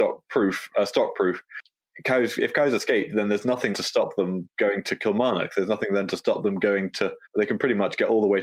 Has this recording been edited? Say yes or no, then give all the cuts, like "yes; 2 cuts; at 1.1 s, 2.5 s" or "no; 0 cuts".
yes; 2 cuts; at 3.7 s, 7.3 s